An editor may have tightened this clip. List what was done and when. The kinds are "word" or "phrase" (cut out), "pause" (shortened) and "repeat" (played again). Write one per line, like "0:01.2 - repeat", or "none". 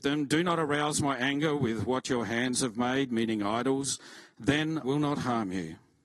0:04.8 - word